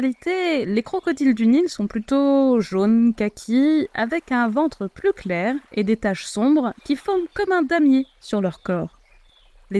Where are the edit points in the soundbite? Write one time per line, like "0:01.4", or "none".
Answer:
none